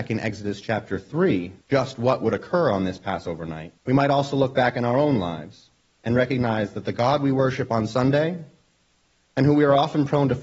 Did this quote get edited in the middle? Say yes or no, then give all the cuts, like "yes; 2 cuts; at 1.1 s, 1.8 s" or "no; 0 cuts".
yes; 2 cuts; at 1.6 s, 3.8 s